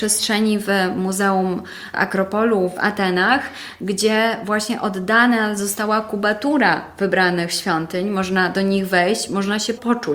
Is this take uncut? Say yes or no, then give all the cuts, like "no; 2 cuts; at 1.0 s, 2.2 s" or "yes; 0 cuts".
yes; 0 cuts